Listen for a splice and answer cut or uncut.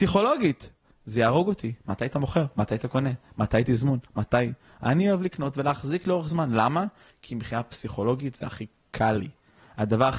uncut